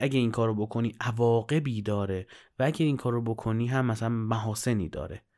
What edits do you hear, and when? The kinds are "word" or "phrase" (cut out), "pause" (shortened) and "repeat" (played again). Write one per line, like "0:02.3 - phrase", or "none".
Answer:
none